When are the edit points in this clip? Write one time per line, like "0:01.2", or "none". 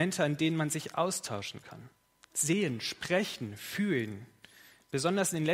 none